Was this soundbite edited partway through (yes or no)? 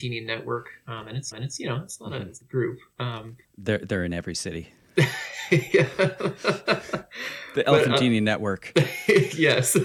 yes